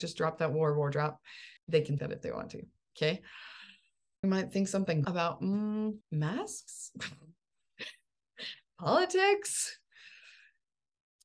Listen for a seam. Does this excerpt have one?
yes; 6 cuts; at 1.6 s, 2.0 s, 4.2 s, 5.0 s, 6.0 s, 8.2 s

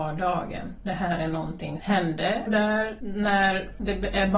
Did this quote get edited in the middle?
yes; 2 cuts; at 1.8 s, 2.5 s

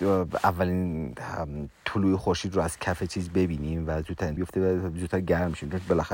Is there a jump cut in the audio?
yes; 1 cut; at 4.4 s

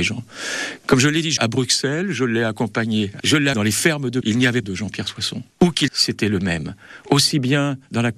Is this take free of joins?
no; 7 cuts; at 1.4 s, 3.2 s, 3.5 s, 4.2 s, 4.6 s, 5.5 s, 5.9 s

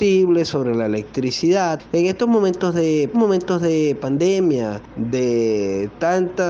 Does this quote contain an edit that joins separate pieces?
yes; 1 cut; at 3.1 s

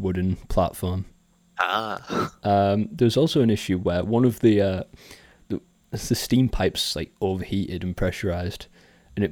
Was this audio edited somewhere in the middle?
no; 0 cuts

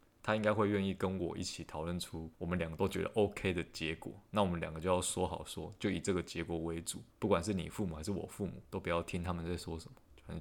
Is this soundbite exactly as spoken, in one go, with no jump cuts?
no; 3 cuts; at 2.3 s, 7.1 s, 8.7 s

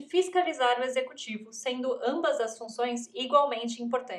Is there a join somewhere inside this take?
no; 0 cuts

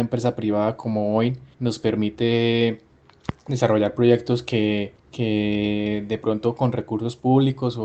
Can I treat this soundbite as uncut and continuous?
no; 2 cuts; at 1.5 s, 5.0 s

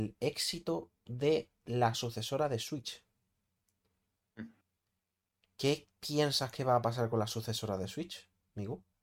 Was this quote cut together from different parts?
no; 0 cuts

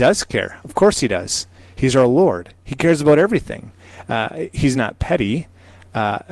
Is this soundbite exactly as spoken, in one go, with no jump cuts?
yes; 0 cuts

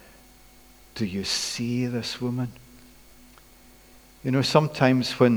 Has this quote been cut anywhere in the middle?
no; 0 cuts

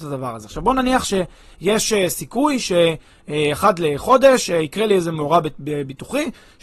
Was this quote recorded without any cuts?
yes; 0 cuts

